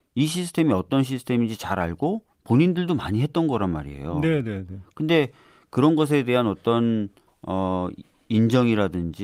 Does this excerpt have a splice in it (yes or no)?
no